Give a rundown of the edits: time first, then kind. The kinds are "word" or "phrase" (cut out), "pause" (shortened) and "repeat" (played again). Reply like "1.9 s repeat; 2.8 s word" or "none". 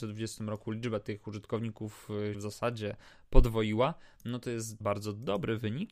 2.3 s word; 4.8 s word